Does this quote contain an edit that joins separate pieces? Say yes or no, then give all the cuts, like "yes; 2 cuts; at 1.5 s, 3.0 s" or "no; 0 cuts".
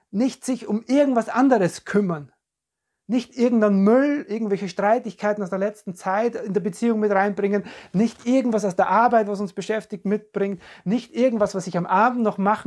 no; 0 cuts